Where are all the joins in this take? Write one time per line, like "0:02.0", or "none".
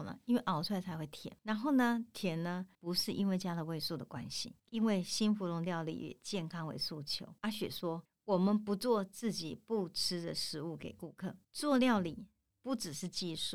0:01.4
0:02.7
0:04.6
0:07.4
0:08.1
0:11.4